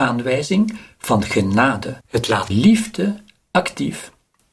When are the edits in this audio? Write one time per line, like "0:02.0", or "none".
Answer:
0:02.0
0:02.5